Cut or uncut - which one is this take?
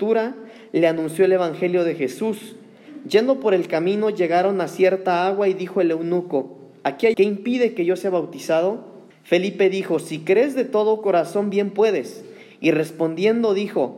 cut